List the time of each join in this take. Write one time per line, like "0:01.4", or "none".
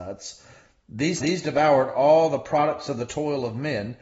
0:01.2